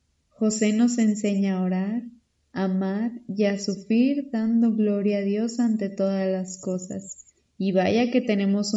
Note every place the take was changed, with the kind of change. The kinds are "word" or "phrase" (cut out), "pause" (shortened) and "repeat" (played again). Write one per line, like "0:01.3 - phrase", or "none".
none